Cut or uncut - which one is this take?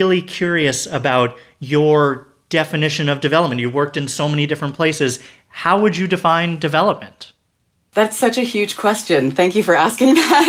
uncut